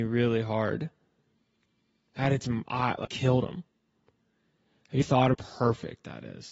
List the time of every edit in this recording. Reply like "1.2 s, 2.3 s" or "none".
2.7 s, 3.0 s, 5.0 s, 5.3 s